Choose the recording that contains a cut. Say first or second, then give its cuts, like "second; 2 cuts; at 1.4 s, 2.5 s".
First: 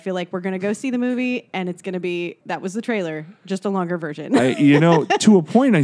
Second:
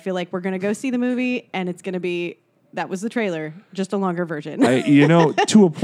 first; 1 cut; at 2.4 s